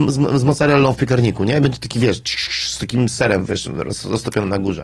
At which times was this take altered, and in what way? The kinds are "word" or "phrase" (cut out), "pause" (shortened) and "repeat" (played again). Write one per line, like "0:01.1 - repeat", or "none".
none

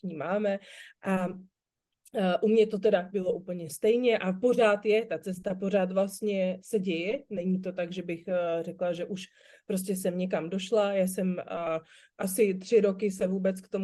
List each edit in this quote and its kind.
none

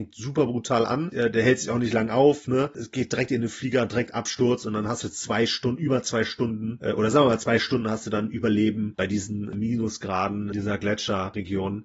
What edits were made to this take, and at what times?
none

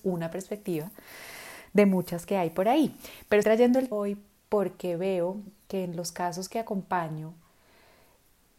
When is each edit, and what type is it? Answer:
0:03.4 - word
0:03.9 - phrase

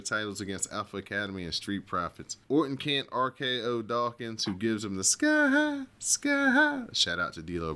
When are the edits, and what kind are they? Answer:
0:02.4 - pause

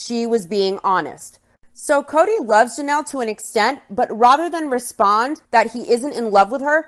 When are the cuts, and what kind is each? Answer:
0:05.4 - pause

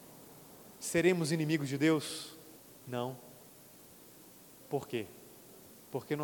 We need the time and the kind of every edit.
0:02.6 - pause

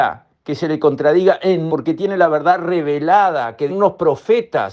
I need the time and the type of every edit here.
0:01.7 - word
0:03.7 - word

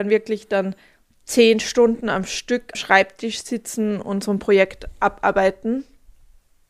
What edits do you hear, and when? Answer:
0:02.7 - word

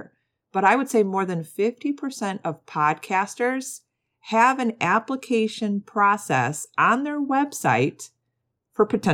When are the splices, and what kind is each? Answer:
none

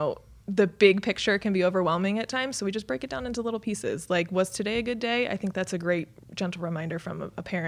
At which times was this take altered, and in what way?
none

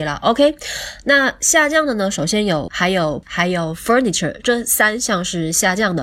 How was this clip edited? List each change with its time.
0:02.7 - word
0:03.2 - word

